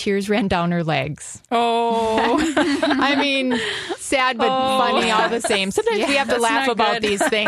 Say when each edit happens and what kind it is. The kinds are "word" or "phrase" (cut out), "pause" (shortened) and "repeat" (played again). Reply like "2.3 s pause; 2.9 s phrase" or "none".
none